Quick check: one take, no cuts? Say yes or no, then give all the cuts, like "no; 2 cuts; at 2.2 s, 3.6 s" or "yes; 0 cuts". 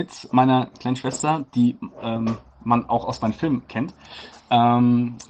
yes; 0 cuts